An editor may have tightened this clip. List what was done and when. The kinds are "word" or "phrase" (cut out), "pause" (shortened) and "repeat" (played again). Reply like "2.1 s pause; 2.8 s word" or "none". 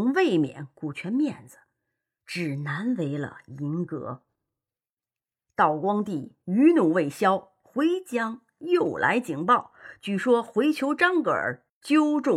none